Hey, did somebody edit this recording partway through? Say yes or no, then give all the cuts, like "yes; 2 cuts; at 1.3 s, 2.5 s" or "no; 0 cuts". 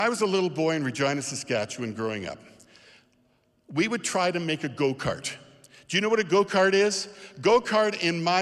no; 0 cuts